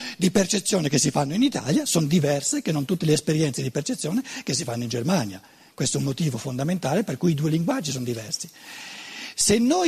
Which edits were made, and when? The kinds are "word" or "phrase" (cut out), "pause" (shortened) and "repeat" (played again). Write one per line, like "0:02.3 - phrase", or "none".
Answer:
none